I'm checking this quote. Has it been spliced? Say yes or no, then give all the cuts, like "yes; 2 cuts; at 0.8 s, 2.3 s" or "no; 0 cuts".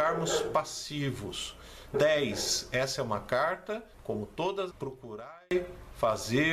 yes; 3 cuts; at 1.9 s, 3.9 s, 4.7 s